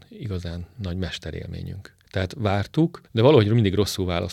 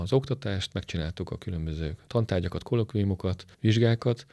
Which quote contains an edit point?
first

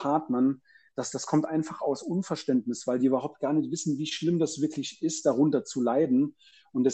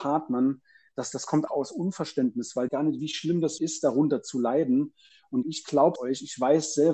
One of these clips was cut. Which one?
second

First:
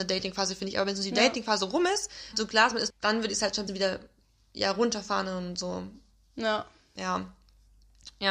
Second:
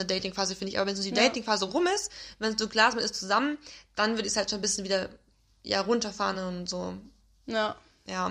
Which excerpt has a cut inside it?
first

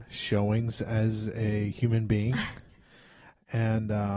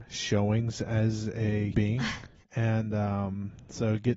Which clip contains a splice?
second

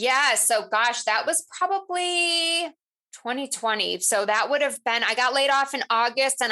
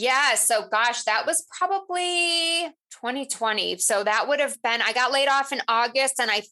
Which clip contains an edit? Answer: second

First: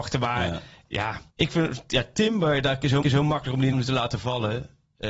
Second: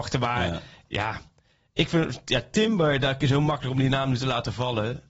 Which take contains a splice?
first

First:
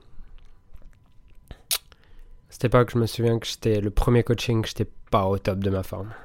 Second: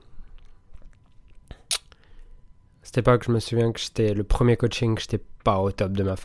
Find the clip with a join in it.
first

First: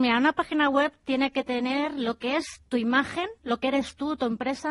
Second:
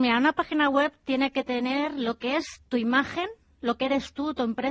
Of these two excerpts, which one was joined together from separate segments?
first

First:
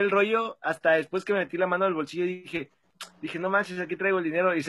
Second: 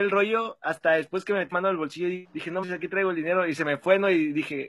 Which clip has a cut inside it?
second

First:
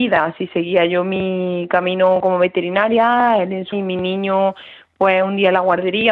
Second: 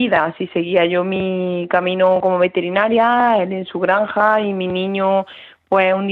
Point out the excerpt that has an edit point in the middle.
first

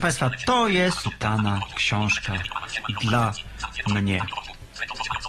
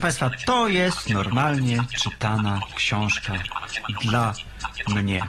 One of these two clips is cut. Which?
first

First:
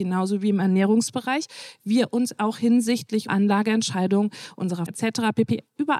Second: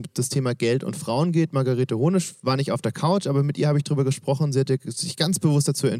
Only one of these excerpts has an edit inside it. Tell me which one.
first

